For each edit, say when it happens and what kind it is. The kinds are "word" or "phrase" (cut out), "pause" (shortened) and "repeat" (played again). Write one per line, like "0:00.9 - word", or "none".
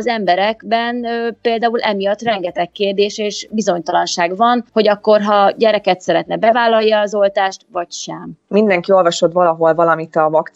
0:04.7 - pause

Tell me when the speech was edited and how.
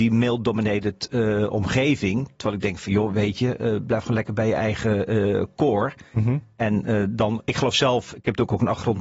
none

